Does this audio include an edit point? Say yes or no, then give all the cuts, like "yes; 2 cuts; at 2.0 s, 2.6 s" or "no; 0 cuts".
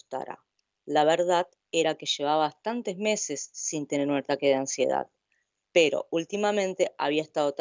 no; 0 cuts